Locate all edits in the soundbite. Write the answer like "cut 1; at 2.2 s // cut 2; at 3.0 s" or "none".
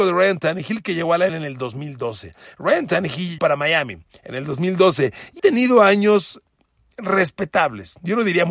cut 1; at 1.3 s // cut 2; at 3.4 s // cut 3; at 5.4 s